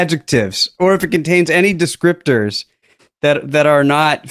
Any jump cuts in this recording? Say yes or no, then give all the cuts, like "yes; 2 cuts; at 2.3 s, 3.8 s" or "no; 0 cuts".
no; 0 cuts